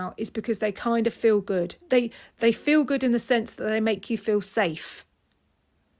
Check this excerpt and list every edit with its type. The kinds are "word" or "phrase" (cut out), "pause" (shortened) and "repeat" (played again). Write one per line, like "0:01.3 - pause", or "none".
0:01.8 - pause